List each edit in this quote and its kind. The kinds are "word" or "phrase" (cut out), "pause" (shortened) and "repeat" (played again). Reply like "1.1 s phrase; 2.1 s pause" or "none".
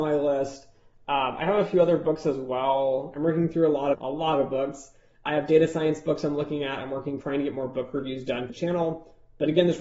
3.9 s word; 5.3 s word; 7.2 s word; 8.5 s word